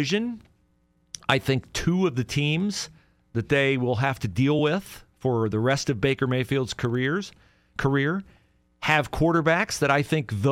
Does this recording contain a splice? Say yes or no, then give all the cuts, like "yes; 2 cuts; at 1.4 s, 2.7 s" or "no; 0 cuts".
no; 0 cuts